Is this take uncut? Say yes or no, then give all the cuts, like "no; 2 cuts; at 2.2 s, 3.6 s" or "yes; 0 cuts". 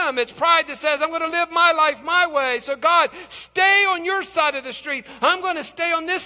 yes; 0 cuts